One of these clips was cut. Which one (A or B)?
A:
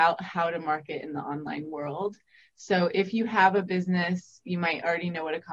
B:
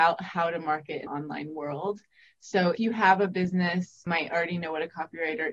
B